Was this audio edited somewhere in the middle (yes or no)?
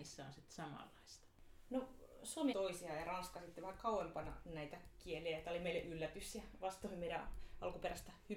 yes